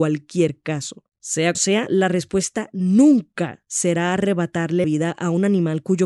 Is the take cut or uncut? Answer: cut